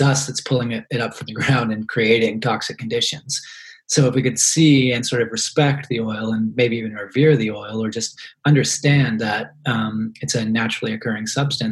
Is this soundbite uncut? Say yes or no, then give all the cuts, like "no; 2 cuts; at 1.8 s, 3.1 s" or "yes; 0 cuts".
yes; 0 cuts